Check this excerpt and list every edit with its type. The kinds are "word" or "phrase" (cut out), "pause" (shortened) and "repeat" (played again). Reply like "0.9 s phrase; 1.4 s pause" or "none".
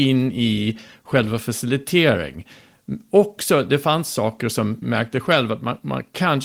4.8 s word